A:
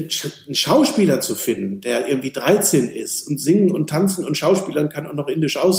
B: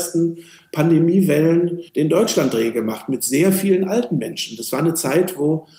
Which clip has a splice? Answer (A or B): B